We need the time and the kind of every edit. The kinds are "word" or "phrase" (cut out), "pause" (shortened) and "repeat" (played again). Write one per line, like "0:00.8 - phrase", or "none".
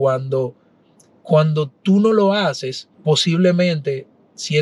0:02.9 - pause